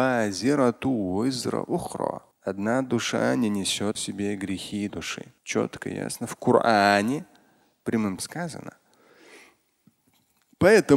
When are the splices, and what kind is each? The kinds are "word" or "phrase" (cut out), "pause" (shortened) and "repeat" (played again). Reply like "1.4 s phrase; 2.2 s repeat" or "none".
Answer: 2.3 s pause; 3.9 s word; 4.9 s word; 5.4 s pause; 8.2 s word